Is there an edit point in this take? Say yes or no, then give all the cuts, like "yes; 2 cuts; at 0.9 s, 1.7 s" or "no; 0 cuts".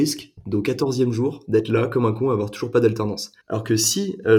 yes; 1 cut; at 3.4 s